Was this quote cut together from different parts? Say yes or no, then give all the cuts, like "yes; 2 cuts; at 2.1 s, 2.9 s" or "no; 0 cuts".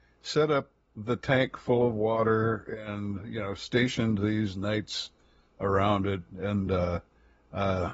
no; 0 cuts